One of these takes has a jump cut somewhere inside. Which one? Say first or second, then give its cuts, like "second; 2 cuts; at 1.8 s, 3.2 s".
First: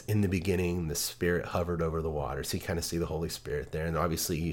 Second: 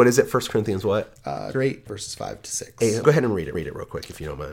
second; 4 cuts; at 1.5 s, 1.9 s, 3.0 s, 3.5 s